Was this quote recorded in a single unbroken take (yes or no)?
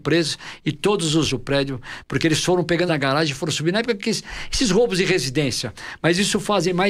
no